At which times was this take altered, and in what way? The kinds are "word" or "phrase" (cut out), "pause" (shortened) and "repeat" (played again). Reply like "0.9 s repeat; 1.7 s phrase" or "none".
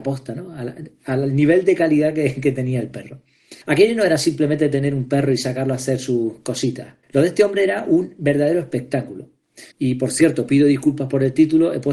3.6 s pause; 7.0 s pause; 9.7 s pause